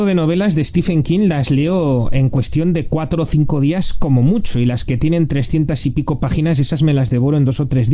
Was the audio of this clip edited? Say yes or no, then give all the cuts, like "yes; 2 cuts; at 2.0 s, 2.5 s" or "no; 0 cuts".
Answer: no; 0 cuts